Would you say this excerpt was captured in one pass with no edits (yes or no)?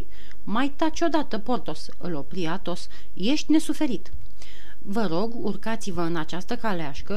yes